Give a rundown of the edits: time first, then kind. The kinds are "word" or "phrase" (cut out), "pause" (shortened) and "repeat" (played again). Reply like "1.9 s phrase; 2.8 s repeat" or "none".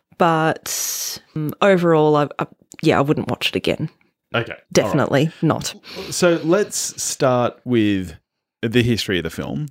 4.6 s pause